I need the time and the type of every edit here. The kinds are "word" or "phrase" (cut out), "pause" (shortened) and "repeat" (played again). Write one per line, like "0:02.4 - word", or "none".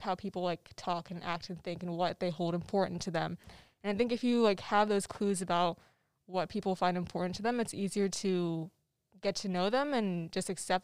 none